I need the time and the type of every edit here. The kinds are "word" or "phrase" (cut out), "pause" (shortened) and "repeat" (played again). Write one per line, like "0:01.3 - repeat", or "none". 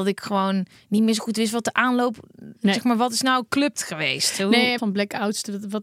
0:03.8 - word
0:04.8 - phrase